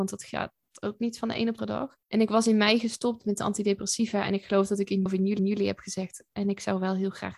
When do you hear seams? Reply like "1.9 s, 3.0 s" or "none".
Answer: 1.6 s, 2.0 s, 5.1 s, 5.4 s